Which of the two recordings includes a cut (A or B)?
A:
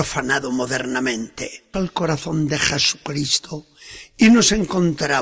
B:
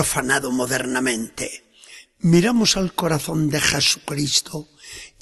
A